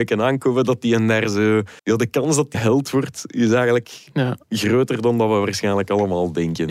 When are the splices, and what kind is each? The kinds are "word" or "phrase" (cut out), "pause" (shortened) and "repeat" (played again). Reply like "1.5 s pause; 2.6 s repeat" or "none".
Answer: 1.8 s pause; 2.5 s word